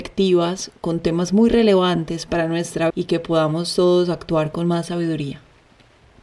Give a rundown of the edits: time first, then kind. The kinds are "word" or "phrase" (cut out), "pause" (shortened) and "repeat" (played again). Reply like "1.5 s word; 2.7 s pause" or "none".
2.9 s word